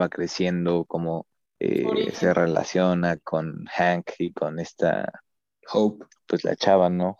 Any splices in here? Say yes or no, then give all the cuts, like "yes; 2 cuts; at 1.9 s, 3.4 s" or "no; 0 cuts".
no; 0 cuts